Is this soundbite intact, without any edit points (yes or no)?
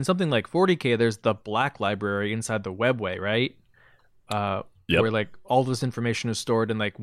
yes